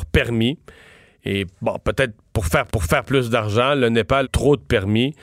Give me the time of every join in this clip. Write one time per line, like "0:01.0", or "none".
0:02.7
0:04.2